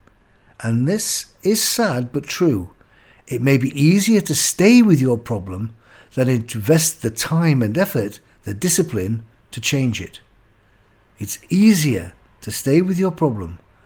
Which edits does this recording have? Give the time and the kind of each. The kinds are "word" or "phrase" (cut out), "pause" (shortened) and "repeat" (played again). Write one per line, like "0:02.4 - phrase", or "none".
none